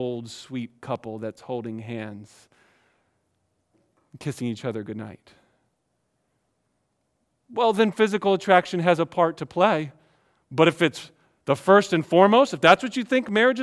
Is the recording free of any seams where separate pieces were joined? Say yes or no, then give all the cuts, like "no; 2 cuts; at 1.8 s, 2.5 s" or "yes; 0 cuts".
yes; 0 cuts